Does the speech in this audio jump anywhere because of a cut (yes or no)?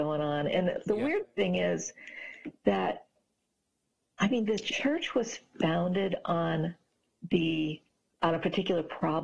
no